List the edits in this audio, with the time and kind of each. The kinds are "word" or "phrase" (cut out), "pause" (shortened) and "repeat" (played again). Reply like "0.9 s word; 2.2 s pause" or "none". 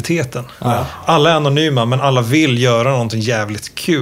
none